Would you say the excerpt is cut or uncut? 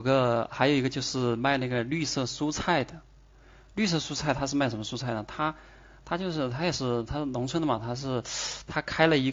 uncut